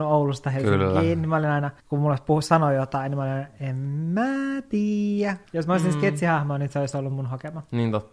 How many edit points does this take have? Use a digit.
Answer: 2